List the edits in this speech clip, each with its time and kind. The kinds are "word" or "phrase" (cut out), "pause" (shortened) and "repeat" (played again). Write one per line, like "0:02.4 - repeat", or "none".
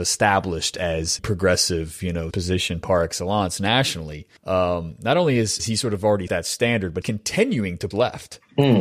0:01.2 - word
0:02.3 - word
0:04.4 - pause
0:05.6 - word
0:06.3 - word
0:07.0 - word
0:07.9 - word